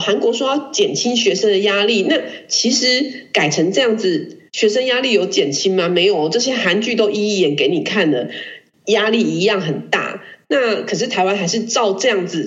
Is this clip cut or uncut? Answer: cut